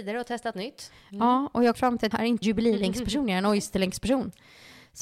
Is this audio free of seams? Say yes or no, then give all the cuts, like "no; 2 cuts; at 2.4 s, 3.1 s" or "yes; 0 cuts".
no; 3 cuts; at 1.7 s, 2.1 s, 2.4 s